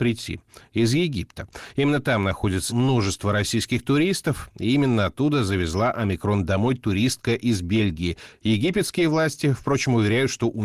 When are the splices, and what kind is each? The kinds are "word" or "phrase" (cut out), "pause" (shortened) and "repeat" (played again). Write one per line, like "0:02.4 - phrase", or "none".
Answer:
0:02.7 - word